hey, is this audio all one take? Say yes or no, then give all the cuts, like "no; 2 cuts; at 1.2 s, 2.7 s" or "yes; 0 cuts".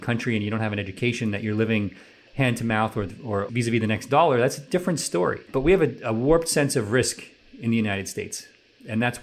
yes; 0 cuts